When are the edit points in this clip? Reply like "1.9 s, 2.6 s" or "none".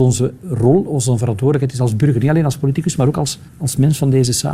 3.5 s